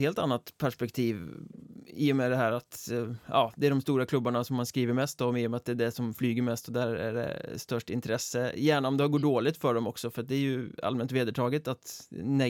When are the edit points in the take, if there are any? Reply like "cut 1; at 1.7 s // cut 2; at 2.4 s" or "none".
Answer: none